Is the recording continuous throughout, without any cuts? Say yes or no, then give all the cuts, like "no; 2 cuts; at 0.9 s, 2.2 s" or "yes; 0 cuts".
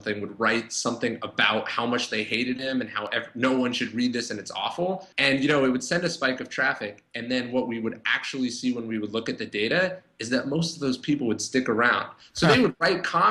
no; 1 cut; at 5.1 s